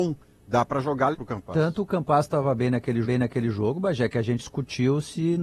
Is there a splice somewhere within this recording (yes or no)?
yes